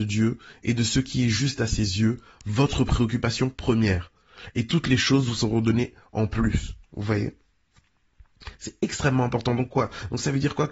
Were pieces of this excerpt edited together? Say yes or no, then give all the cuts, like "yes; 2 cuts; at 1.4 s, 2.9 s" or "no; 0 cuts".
no; 0 cuts